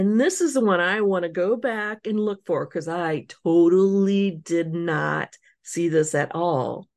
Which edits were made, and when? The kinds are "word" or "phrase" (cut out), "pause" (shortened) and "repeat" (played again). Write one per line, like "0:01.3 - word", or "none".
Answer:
none